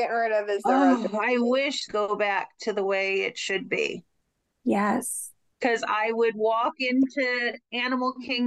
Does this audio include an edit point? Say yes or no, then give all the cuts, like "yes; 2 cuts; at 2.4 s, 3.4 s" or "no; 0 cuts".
yes; 2 cuts; at 1.9 s, 5.5 s